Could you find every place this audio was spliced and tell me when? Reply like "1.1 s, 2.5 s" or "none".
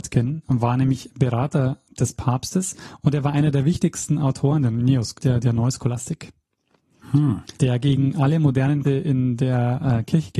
5.2 s, 7.6 s, 8.8 s

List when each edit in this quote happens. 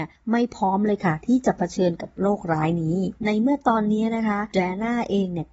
3.2 s

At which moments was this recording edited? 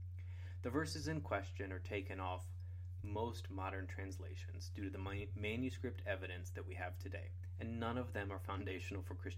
none

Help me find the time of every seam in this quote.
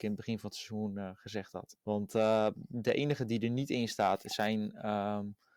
1.8 s

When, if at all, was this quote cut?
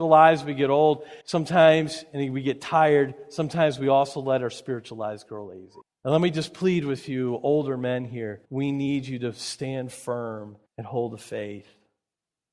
1.2 s, 5.8 s, 8.4 s, 10.7 s

